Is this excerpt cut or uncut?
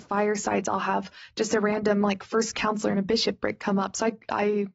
uncut